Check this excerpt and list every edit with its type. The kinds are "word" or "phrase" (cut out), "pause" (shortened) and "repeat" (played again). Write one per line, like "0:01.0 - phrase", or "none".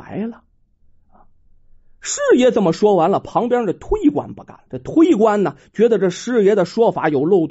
0:04.7 - pause